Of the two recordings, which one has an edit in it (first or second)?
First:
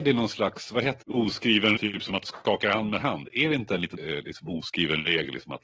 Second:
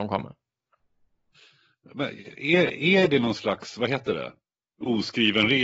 first